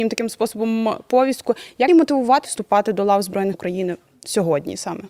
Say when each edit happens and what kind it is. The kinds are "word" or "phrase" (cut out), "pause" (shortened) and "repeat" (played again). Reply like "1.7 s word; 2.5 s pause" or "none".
1.9 s word; 2.4 s word; 3.5 s word